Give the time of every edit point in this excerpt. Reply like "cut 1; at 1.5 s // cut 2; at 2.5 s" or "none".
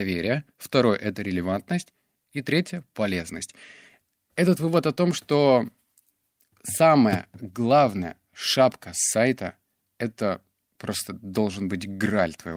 none